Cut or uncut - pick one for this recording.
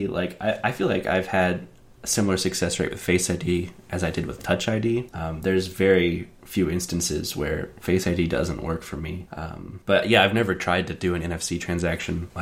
uncut